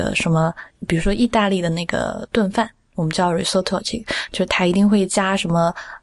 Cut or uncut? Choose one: uncut